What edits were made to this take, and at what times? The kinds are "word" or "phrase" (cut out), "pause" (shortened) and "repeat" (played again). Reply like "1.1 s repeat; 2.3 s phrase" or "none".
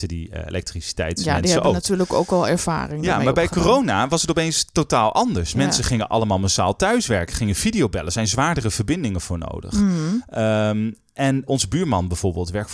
11.5 s word